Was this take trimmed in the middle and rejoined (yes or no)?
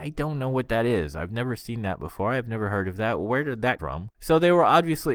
yes